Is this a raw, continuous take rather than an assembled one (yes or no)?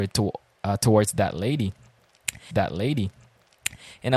no